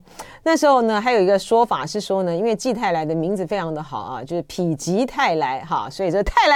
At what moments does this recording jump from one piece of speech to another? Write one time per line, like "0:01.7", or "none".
none